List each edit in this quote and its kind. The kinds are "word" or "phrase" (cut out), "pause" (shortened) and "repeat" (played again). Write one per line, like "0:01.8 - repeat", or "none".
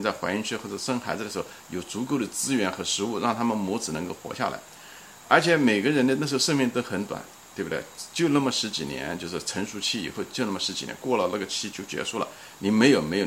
none